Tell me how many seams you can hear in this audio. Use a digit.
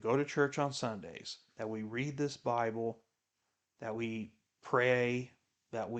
0